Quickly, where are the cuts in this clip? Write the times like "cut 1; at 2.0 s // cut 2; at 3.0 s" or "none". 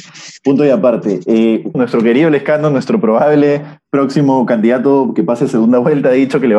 cut 1; at 1.7 s